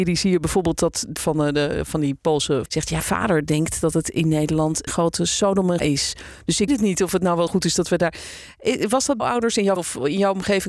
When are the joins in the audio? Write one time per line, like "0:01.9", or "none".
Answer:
0:01.2
0:02.7
0:03.0
0:04.9
0:05.8
0:06.7
0:07.5
0:09.2
0:09.8